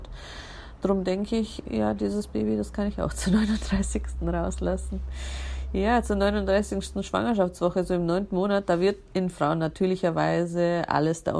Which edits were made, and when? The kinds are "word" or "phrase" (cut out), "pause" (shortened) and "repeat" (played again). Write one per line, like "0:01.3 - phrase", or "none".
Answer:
0:09.3 - phrase